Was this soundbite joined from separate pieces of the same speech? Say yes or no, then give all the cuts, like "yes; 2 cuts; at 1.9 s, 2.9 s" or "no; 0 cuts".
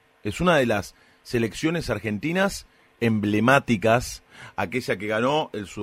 no; 0 cuts